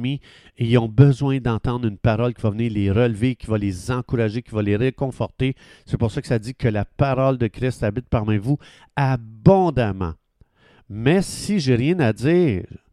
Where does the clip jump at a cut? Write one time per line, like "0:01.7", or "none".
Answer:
none